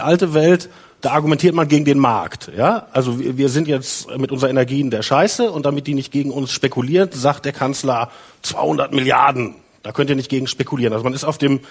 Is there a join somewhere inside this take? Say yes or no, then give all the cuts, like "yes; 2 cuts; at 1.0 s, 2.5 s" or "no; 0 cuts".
no; 0 cuts